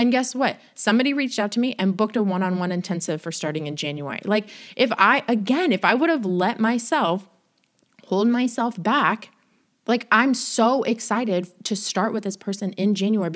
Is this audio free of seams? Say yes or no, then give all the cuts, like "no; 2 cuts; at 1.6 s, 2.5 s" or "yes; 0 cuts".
yes; 0 cuts